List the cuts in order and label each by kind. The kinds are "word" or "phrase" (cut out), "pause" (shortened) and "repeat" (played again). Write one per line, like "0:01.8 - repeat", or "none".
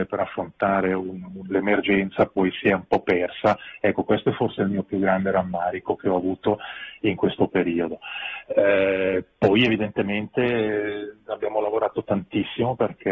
none